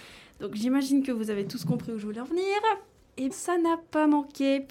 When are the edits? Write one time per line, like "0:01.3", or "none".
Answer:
0:03.3